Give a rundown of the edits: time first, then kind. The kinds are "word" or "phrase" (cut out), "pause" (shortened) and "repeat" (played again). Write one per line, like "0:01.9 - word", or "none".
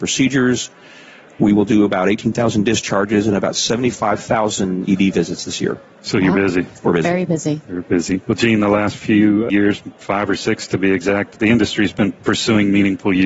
0:05.9 - pause
0:08.2 - pause
0:12.2 - pause